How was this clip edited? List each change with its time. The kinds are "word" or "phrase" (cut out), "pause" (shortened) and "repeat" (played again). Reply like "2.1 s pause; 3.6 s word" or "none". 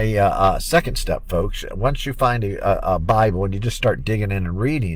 none